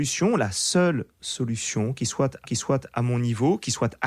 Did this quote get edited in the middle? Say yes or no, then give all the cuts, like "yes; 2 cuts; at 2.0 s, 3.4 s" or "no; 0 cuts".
yes; 1 cut; at 2.4 s